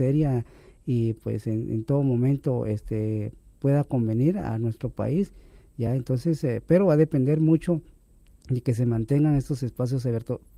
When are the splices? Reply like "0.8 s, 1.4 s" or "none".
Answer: none